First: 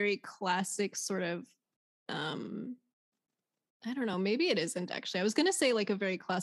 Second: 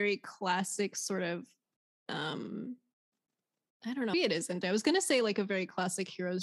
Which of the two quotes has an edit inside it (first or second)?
second